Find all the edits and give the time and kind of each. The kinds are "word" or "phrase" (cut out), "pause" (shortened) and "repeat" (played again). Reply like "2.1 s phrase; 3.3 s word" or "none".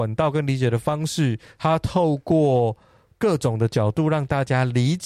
none